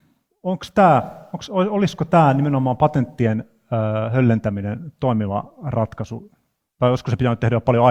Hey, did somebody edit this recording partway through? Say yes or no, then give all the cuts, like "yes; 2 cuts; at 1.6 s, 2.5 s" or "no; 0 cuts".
no; 0 cuts